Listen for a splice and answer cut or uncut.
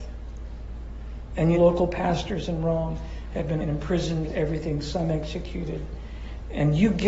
cut